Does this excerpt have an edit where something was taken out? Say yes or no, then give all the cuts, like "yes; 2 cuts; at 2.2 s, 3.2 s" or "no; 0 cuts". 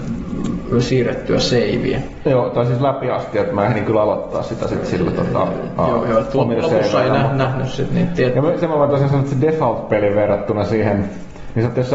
no; 0 cuts